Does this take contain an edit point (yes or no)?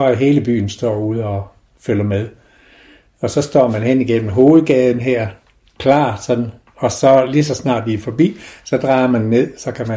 no